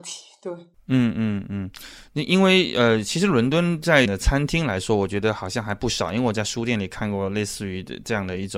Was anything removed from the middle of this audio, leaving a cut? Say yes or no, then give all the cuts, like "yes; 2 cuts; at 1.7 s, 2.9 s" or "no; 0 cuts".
yes; 1 cut; at 4.0 s